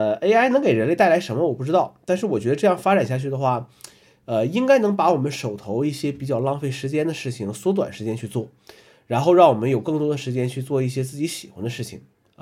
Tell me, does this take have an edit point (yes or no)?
no